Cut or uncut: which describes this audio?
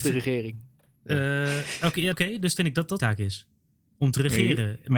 cut